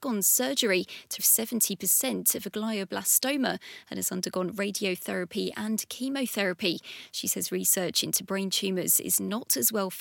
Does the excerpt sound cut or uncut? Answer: cut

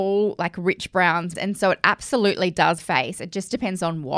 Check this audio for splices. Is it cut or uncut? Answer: cut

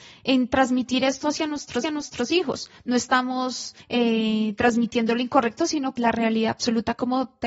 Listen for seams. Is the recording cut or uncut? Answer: cut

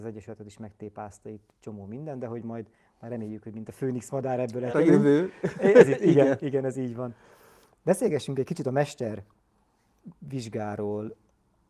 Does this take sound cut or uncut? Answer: cut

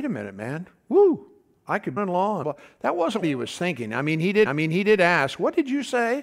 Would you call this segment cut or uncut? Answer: cut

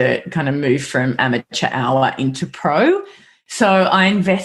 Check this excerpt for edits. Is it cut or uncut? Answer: uncut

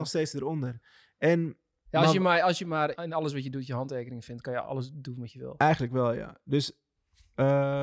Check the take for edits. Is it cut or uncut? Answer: cut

